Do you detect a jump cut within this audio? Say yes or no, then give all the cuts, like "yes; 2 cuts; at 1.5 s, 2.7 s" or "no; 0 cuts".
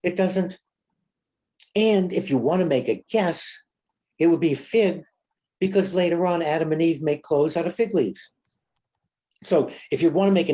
no; 0 cuts